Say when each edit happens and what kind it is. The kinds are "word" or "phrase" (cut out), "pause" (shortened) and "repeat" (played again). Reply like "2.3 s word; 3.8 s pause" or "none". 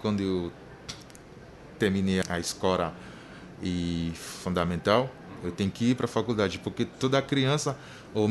2.2 s word